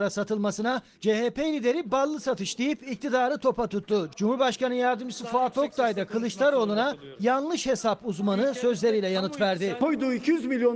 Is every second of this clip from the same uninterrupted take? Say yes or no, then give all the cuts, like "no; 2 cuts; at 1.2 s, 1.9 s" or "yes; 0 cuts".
yes; 0 cuts